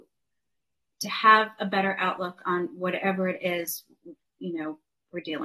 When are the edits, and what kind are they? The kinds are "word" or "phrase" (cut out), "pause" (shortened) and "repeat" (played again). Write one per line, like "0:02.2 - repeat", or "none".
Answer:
none